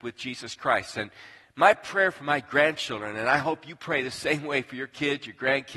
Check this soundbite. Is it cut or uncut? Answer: uncut